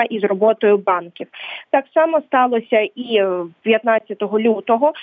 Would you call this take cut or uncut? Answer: uncut